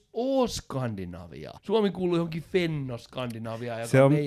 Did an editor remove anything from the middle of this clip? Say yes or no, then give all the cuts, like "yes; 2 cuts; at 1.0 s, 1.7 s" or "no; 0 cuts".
yes; 1 cut; at 1.6 s